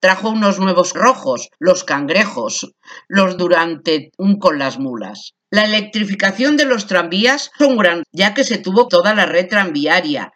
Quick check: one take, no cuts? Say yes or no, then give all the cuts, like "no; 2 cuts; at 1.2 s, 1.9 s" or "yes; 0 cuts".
no; 8 cuts; at 0.9 s, 1.5 s, 3.4 s, 4.4 s, 5.4 s, 7.6 s, 8.0 s, 8.9 s